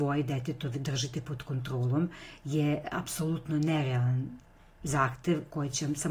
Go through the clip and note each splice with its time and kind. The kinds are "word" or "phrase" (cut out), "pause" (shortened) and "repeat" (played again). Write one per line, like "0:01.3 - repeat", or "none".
none